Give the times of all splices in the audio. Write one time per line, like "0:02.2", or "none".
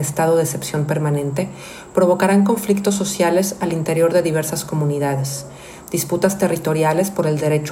none